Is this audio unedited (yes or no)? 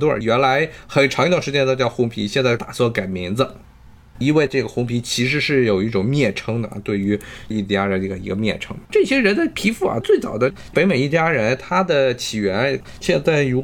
no